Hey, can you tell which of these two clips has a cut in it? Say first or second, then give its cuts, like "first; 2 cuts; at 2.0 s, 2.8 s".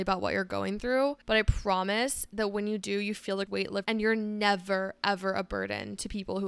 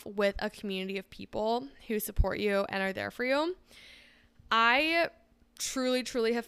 first; 3 cuts; at 1.2 s, 3.5 s, 3.8 s